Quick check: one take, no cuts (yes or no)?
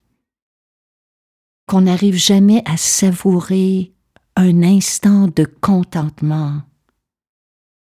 yes